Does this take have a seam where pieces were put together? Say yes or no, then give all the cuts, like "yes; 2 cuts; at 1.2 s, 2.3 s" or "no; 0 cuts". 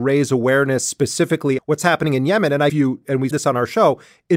yes; 3 cuts; at 1.6 s, 2.7 s, 3.3 s